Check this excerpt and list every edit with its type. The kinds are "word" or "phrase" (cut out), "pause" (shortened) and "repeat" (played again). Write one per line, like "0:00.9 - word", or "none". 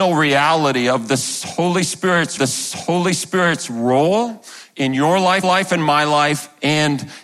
0:02.4 - repeat
0:05.4 - repeat